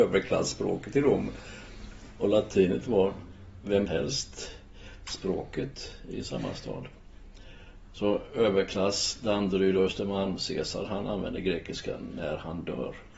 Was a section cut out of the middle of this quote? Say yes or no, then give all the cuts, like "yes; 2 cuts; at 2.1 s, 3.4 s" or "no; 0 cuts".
yes; 1 cut; at 3.9 s